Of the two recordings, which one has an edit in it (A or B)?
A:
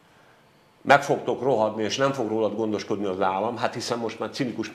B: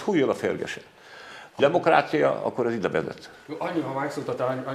B